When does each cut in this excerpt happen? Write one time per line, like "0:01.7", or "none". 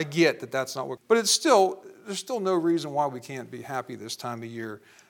0:01.0

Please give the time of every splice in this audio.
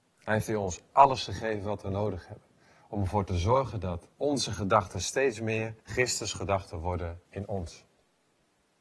0:04.1
0:05.8
0:07.3

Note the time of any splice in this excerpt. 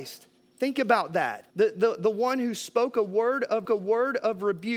0:01.5
0:03.6

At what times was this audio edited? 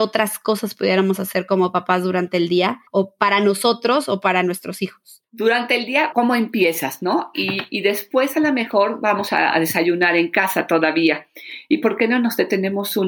0:02.9
0:06.1

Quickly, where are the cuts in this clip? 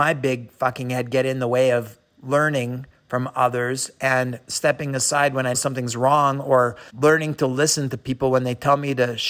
0:05.5
0:06.9

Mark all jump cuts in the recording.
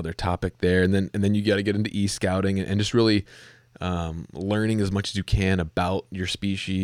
none

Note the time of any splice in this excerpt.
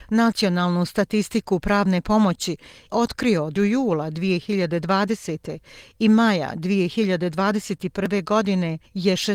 0:02.9
0:03.6

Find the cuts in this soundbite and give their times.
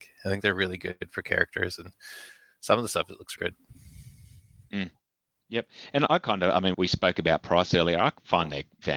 0:03.4
0:06.1
0:06.7

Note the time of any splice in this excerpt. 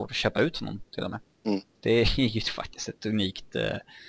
0:01.8

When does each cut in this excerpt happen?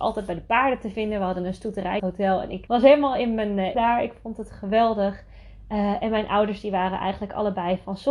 0:02.0
0:02.7
0:03.7

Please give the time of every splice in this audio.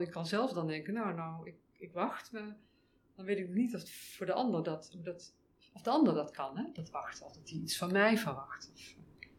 none

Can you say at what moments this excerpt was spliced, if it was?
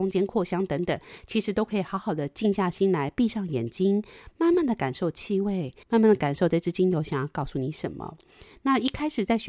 0:05.8

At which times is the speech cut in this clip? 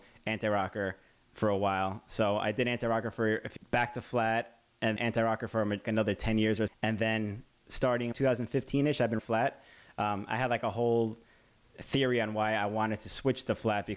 0:03.6
0:05.0
0:05.8
0:06.7
0:08.1
0:09.2

